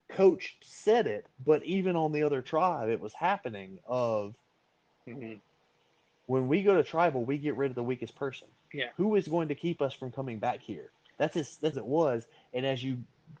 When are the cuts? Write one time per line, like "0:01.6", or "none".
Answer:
0:01.3
0:11.7